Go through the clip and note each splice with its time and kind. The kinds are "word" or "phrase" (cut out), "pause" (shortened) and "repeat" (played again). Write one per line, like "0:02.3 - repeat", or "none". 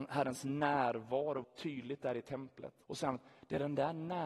0:01.4 - word
0:02.8 - pause